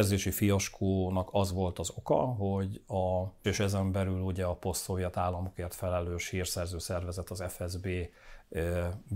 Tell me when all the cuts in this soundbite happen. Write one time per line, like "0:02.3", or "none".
0:03.4